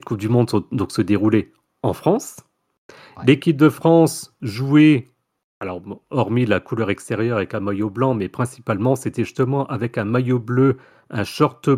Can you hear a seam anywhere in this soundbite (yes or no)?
no